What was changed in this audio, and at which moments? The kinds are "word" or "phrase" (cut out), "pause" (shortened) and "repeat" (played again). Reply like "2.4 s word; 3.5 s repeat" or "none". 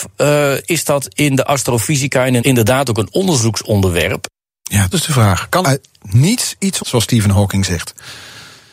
2.4 s word; 4.9 s word; 5.6 s word; 6.8 s word